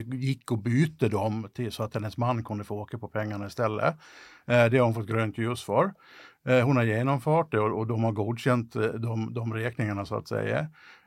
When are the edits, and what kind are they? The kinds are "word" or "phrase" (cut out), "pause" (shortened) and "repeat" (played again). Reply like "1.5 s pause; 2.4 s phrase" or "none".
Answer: none